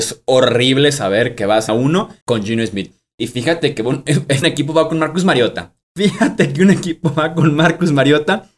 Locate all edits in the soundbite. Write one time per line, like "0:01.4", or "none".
0:01.7
0:02.2
0:04.4
0:05.8

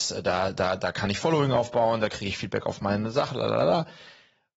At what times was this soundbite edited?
none

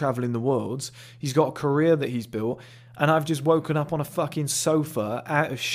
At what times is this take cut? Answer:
none

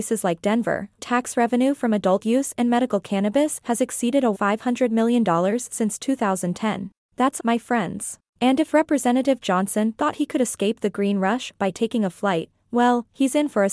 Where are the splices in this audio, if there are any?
0:01.0
0:04.3
0:07.0
0:07.4
0:08.3

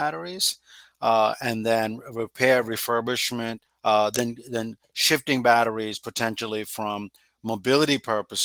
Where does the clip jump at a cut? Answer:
0:03.7

